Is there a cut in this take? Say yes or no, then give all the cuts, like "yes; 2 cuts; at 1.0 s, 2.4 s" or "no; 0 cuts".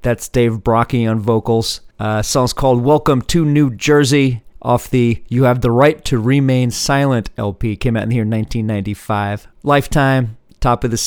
yes; 3 cuts; at 1.9 s, 4.5 s, 9.5 s